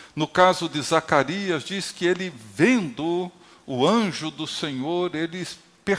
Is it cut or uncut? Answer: uncut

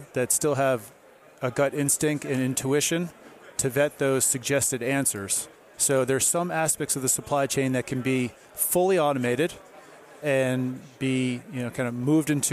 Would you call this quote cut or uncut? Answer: uncut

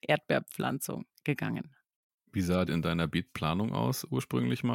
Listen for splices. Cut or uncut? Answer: cut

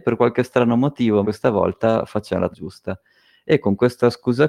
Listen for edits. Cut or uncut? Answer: cut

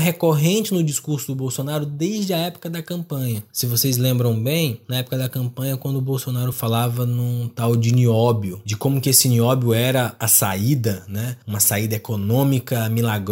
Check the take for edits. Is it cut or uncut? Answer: uncut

